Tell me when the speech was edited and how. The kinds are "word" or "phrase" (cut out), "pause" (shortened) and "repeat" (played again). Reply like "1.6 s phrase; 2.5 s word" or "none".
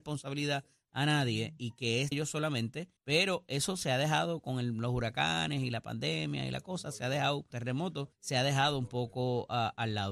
1.6 s word; 2.1 s word; 3.0 s pause; 7.5 s phrase; 8.1 s pause